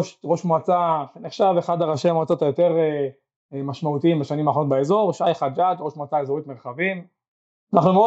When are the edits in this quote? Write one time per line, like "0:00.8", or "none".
none